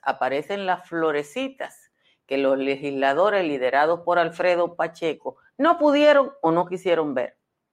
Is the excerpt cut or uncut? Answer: uncut